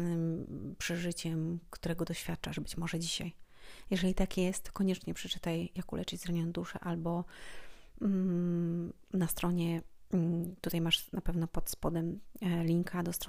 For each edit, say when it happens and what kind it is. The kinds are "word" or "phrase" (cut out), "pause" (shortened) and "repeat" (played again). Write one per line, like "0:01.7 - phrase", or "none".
none